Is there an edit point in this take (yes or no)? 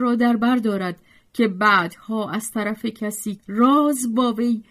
yes